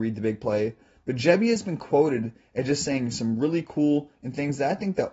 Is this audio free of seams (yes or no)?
yes